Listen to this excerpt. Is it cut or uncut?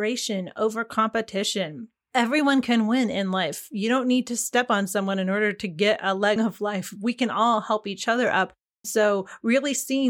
cut